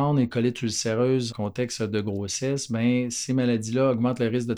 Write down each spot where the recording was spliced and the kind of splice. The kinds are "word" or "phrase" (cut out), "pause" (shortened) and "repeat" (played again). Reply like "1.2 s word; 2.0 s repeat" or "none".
1.3 s word

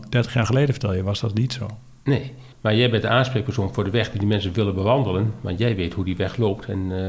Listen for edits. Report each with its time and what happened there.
2.5 s pause

